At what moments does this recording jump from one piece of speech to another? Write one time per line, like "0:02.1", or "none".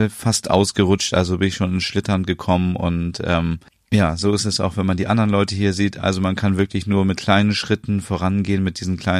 0:03.7